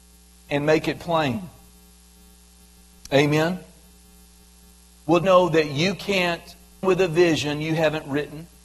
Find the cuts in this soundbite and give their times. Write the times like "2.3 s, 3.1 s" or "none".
5.2 s, 6.8 s

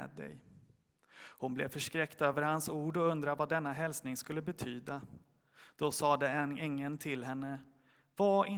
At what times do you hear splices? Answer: none

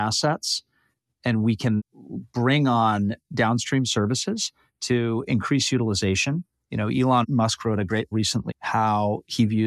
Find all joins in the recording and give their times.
1.8 s, 8.1 s, 8.5 s

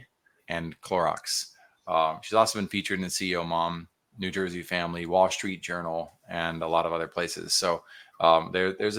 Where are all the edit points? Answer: none

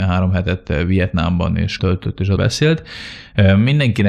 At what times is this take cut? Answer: 1.8 s, 2.4 s

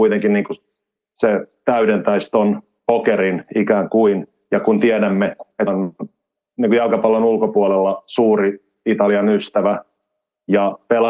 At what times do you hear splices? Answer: 5.7 s

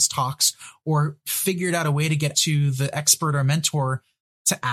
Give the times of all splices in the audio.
2.3 s

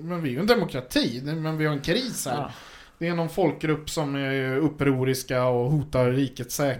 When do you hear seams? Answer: none

